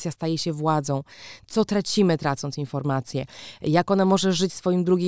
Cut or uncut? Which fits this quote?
uncut